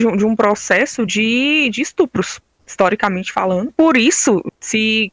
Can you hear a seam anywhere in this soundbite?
no; 0 cuts

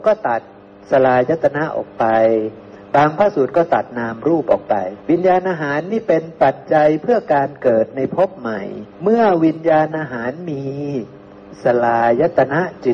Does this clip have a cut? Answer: yes; 2 cuts; at 5.0 s, 8.9 s

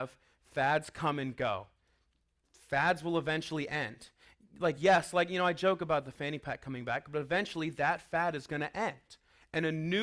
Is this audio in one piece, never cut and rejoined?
yes; 0 cuts

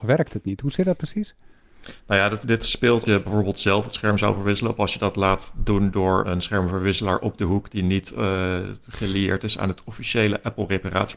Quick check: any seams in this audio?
yes; 3 cuts; at 2.4 s, 3.1 s, 6.2 s

